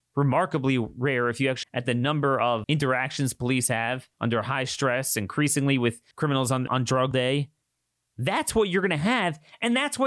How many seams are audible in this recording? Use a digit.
7